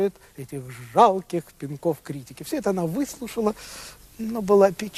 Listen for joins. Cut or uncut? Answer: uncut